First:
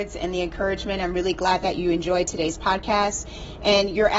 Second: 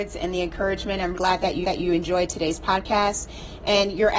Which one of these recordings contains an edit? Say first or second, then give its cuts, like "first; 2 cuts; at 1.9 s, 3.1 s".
second; 2 cuts; at 1.1 s, 1.6 s